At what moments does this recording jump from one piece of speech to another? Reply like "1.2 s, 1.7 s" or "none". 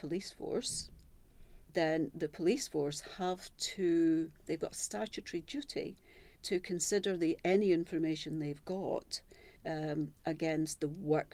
1.7 s, 4.4 s, 6.3 s, 9.6 s